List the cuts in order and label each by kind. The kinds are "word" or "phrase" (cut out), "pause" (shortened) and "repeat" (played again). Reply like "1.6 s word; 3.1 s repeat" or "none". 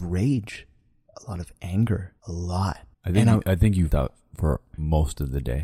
2.2 s pause; 2.9 s pause; 3.9 s word